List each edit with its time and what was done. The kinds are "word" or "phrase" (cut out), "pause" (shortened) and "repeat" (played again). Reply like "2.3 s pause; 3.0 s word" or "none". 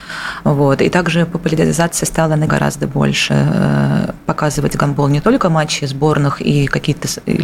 2.5 s word